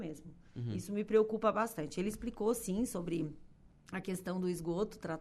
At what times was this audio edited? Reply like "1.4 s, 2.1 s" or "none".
none